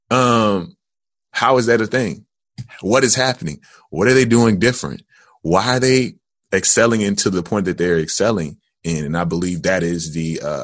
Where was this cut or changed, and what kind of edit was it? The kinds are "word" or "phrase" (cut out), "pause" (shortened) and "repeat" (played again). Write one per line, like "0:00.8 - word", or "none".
none